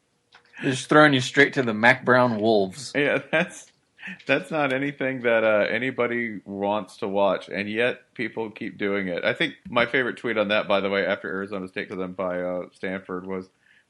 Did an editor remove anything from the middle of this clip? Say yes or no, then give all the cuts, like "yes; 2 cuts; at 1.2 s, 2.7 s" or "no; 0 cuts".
yes; 2 cuts; at 9.6 s, 11.9 s